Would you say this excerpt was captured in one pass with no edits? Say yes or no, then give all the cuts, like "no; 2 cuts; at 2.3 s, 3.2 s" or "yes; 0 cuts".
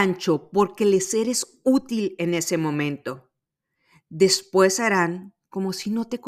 yes; 0 cuts